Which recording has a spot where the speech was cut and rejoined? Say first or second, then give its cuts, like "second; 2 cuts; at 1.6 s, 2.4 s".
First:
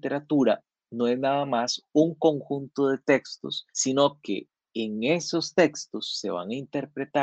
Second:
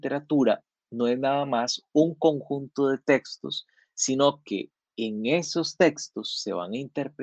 first; 1 cut; at 3.7 s